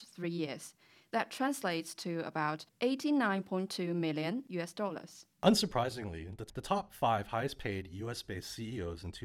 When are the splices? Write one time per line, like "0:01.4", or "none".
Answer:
0:02.7
0:05.3